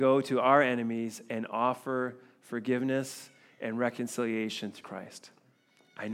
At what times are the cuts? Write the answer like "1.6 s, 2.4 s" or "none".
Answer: 4.8 s